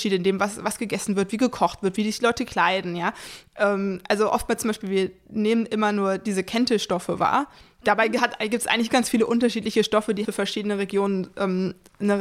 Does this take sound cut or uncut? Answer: cut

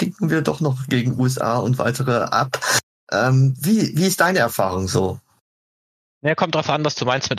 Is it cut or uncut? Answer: uncut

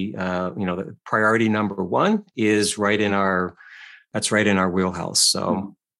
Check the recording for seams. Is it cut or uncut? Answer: uncut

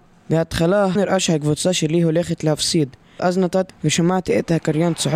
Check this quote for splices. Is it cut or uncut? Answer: cut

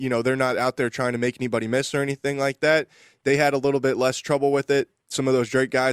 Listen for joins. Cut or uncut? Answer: uncut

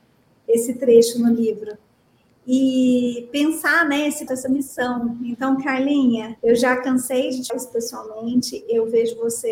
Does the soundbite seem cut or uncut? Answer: cut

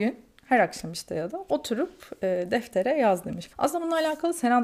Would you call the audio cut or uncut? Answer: cut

